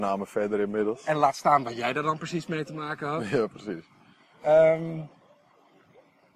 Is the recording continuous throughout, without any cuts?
yes; 0 cuts

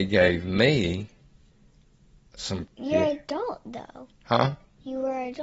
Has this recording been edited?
yes; 1 cut; at 2.7 s

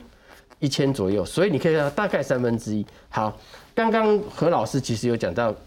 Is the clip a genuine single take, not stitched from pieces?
yes; 0 cuts

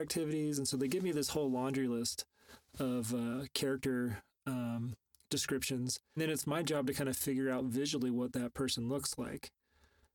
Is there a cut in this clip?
yes; 1 cut; at 6.2 s

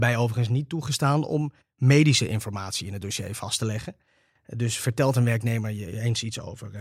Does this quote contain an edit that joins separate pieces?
no; 0 cuts

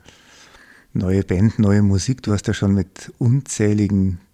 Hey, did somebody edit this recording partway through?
no; 0 cuts

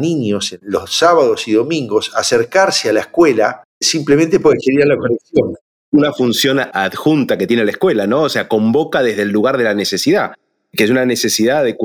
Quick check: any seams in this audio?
no; 0 cuts

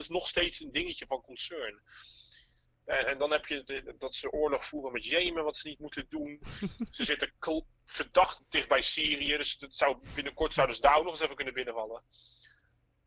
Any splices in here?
no; 0 cuts

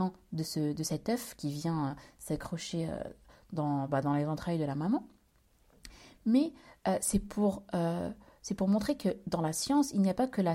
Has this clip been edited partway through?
no; 0 cuts

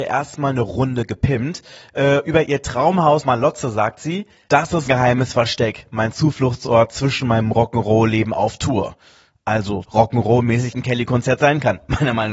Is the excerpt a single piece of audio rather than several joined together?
no; 4 cuts; at 3.2 s, 4.9 s, 9.8 s, 10.7 s

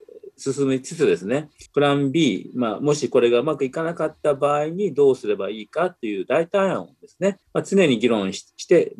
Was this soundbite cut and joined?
yes; 2 cuts; at 1.7 s, 7.4 s

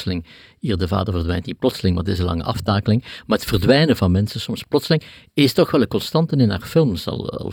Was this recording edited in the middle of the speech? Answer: no; 0 cuts

